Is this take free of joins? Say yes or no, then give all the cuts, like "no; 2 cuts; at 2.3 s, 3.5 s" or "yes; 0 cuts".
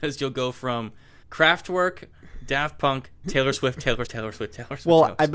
no; 3 cuts; at 1.2 s, 3.2 s, 4.1 s